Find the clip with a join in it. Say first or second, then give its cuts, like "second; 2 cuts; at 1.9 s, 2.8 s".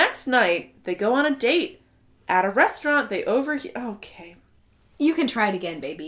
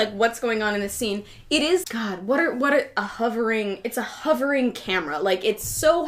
second; 1 cut; at 1.8 s